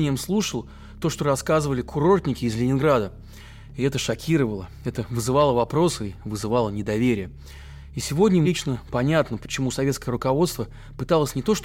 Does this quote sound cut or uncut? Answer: cut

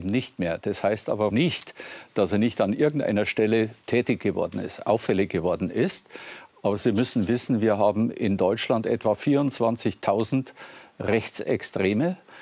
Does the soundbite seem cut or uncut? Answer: uncut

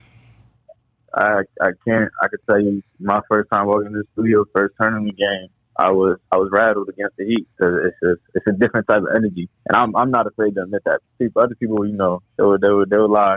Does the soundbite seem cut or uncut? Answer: cut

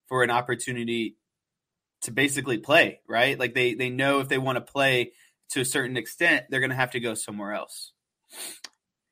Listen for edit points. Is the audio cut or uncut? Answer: uncut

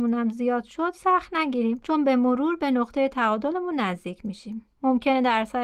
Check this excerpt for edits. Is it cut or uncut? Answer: cut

